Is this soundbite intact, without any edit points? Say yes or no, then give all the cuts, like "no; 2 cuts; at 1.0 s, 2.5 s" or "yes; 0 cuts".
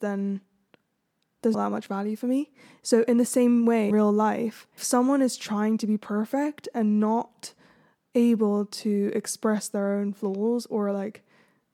no; 3 cuts; at 1.5 s, 3.9 s, 4.8 s